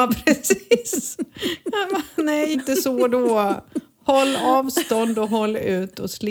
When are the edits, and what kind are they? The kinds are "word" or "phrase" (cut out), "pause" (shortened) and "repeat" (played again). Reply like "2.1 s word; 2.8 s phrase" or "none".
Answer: 2.5 s word